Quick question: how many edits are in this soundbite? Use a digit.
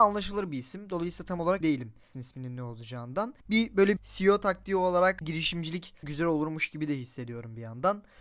6